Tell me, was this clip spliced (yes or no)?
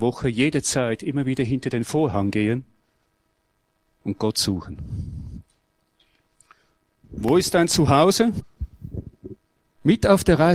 no